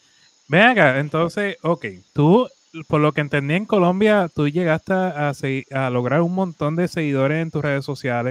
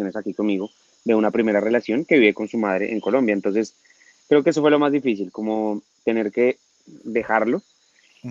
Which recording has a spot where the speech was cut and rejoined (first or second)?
first